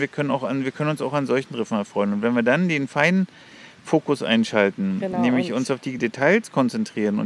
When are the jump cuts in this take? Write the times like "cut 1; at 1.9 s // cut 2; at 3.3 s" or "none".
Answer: none